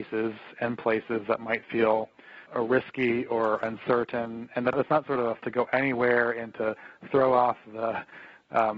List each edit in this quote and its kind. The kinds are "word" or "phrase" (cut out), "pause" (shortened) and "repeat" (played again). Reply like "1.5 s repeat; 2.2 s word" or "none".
2.5 s pause; 4.7 s phrase; 5.4 s phrase